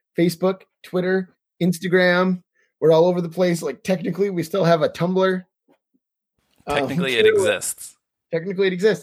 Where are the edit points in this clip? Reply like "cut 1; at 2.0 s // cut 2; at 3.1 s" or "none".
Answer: none